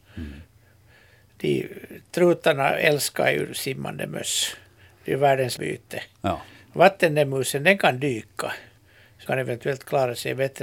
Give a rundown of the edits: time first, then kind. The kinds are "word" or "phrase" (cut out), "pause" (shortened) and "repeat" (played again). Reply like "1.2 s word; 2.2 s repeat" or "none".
5.6 s word; 9.3 s word